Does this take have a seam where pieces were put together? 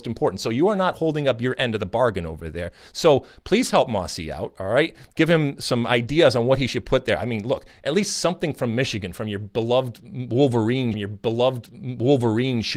yes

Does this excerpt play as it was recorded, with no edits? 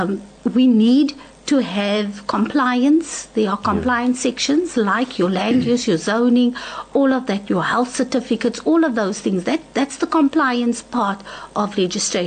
yes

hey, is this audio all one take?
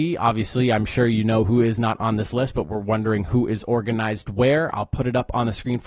yes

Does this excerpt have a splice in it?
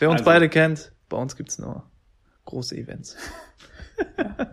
no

